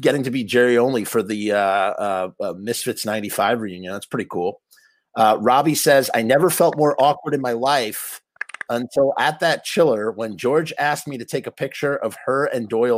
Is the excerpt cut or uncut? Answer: uncut